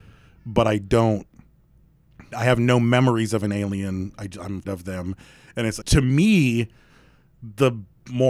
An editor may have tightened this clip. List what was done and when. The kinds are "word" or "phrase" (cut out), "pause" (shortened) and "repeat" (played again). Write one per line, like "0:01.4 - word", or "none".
0:02.3 - word
0:04.7 - word
0:05.8 - word